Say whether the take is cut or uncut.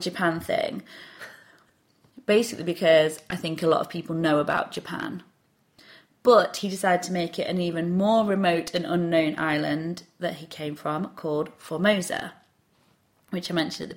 uncut